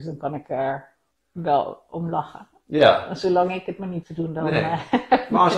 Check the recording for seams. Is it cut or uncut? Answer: cut